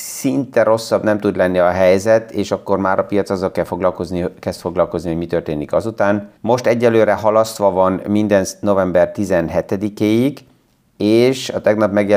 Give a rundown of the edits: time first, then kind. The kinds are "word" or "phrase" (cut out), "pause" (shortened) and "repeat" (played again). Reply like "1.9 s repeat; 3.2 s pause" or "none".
6.4 s pause